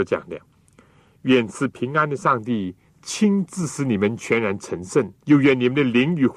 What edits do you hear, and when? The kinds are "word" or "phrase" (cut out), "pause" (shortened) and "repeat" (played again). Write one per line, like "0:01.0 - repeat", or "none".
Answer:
0:02.9 - pause
0:05.2 - pause